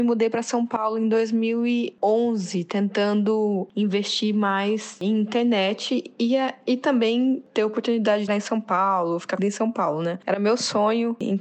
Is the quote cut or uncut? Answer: cut